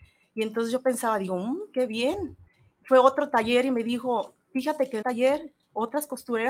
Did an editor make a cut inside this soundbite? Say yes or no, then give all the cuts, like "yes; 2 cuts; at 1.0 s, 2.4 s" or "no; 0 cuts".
yes; 2 cuts; at 2.5 s, 5.0 s